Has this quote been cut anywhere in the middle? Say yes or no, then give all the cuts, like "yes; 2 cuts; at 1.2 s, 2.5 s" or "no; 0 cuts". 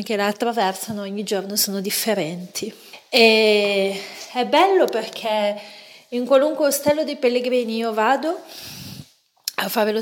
no; 0 cuts